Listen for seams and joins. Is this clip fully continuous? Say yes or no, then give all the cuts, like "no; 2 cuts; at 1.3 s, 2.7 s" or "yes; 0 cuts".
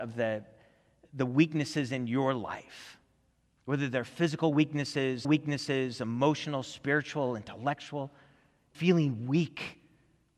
no; 2 cuts; at 5.2 s, 8.7 s